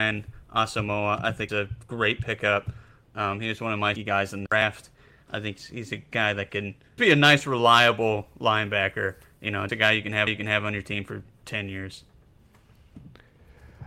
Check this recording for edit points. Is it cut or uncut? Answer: cut